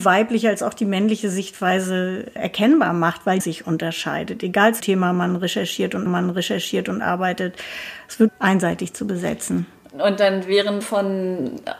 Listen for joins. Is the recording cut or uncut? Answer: cut